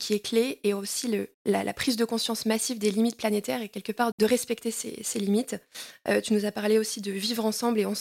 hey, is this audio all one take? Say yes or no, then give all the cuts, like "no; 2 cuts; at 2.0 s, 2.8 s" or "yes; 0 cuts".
no; 2 cuts; at 1.3 s, 4.1 s